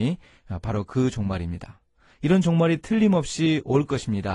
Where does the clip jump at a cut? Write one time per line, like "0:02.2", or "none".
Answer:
none